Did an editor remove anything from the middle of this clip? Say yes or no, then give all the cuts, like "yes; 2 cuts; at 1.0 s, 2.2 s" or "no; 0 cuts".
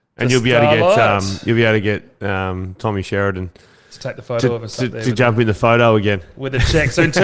no; 0 cuts